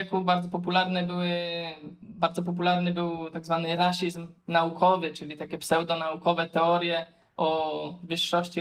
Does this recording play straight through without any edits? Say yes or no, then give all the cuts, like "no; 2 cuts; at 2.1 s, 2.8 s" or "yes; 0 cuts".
yes; 0 cuts